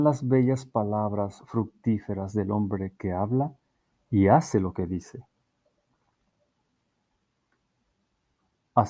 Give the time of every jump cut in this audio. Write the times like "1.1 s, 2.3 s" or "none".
none